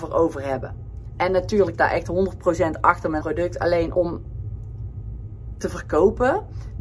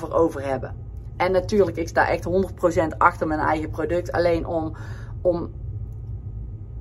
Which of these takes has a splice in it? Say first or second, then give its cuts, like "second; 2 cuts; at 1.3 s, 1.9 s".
first; 3 cuts; at 1.7 s, 3.2 s, 3.9 s